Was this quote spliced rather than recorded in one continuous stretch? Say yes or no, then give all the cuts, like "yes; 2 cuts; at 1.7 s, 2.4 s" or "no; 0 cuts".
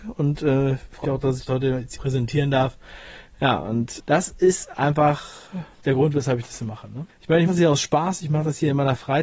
yes; 7 cuts; at 1.0 s, 1.5 s, 2.0 s, 4.0 s, 5.7 s, 7.1 s, 7.5 s